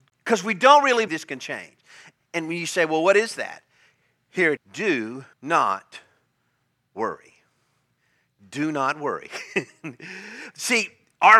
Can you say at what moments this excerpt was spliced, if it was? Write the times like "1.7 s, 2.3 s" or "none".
1.1 s, 4.6 s, 5.3 s